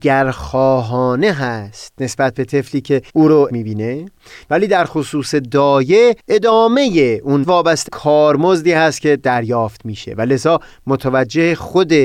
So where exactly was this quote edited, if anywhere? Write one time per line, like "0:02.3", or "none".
0:03.1
0:03.5
0:06.2
0:07.4
0:07.9